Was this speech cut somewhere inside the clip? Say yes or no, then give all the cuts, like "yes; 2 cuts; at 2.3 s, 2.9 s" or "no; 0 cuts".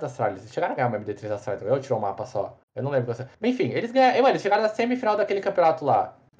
yes; 2 cuts; at 2.6 s, 3.3 s